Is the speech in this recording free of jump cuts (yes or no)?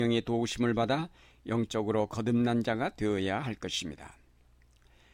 yes